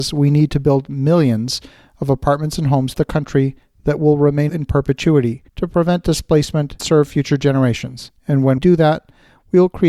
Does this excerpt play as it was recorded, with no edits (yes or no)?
no